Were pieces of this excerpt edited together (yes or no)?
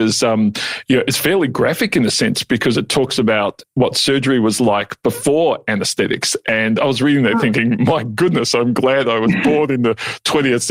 no